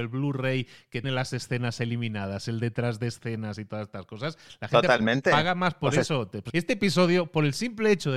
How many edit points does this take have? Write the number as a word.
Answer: two